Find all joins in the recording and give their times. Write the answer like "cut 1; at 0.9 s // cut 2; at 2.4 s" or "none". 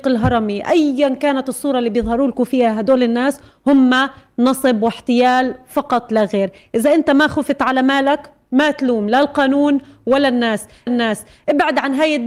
cut 1; at 10.9 s